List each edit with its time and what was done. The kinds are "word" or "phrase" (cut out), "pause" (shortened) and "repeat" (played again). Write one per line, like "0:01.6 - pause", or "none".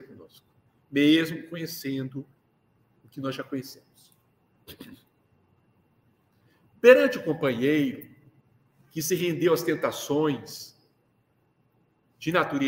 none